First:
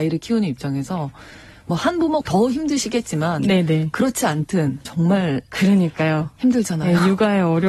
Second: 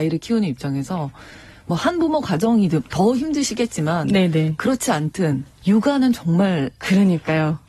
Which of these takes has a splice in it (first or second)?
first